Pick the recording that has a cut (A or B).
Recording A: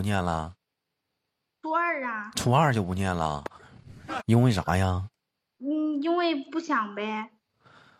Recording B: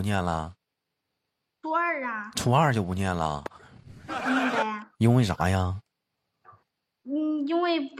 A